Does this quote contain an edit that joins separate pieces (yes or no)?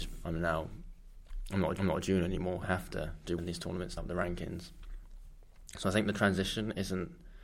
yes